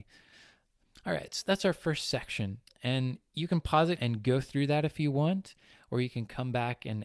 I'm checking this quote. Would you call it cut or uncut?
cut